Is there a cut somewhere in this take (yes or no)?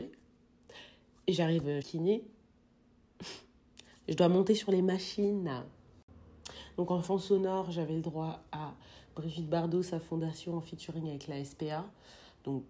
yes